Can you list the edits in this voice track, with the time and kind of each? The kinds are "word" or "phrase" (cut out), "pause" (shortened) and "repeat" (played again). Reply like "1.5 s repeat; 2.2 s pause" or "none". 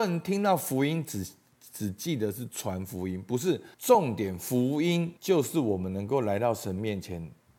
3.7 s pause; 5.2 s pause